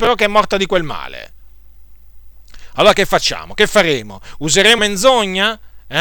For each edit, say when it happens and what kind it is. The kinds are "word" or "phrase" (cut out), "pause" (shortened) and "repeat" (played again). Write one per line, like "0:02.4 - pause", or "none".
0:04.8 - word